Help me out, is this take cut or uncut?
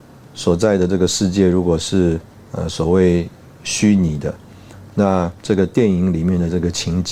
cut